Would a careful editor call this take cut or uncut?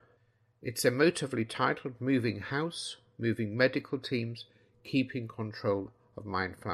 uncut